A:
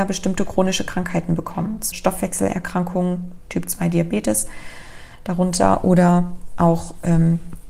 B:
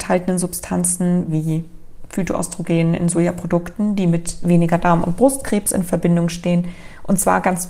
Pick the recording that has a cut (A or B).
A